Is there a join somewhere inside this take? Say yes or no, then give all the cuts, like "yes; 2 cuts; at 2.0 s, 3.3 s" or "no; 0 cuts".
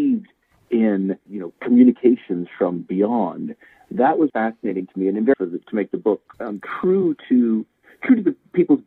yes; 4 cuts; at 1.3 s, 4.3 s, 5.3 s, 6.3 s